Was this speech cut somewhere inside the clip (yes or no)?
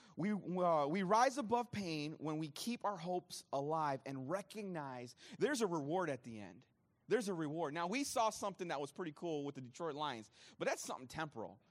no